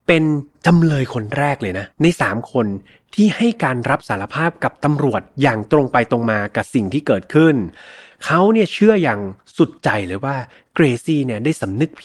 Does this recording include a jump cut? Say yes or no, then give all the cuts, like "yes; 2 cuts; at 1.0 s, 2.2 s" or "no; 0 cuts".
yes; 1 cut; at 1.9 s